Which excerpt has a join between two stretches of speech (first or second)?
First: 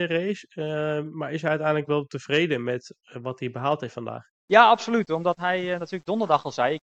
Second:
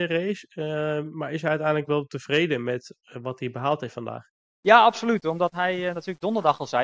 first